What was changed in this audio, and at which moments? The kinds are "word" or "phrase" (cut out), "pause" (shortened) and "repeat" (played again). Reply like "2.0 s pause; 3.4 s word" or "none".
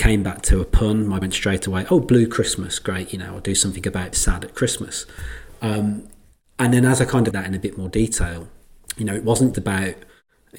1.2 s word; 4.1 s word; 7.3 s word; 9.5 s word